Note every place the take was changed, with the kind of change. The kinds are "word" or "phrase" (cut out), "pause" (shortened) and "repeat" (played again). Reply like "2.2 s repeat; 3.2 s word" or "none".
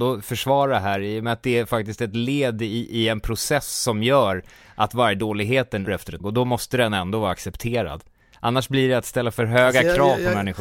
5.9 s word; 6.2 s word